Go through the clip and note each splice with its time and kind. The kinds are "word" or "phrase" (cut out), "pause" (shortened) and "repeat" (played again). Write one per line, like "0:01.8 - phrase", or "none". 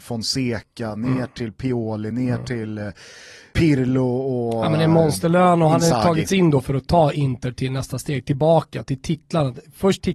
none